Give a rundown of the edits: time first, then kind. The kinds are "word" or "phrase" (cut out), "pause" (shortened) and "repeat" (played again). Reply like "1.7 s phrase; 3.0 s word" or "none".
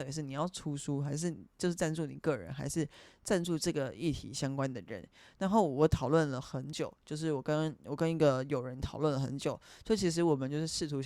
none